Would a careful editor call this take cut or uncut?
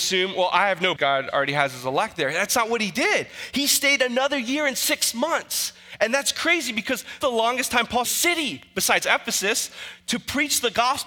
cut